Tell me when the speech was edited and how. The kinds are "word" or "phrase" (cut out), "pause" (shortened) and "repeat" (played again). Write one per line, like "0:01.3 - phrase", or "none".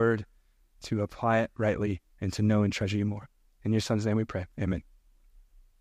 0:02.1 - pause
0:04.5 - pause